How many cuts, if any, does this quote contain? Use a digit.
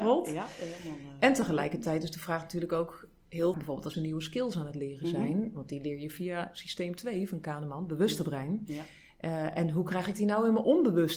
2